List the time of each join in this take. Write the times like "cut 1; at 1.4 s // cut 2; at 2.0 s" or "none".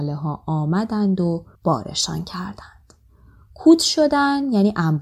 cut 1; at 1.5 s